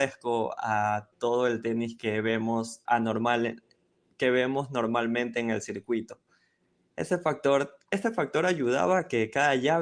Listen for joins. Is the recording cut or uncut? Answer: cut